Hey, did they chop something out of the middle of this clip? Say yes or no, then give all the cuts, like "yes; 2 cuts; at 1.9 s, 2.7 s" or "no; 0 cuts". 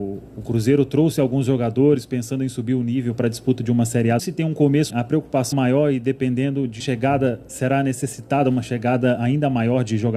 yes; 4 cuts; at 4.2 s, 4.9 s, 5.5 s, 6.8 s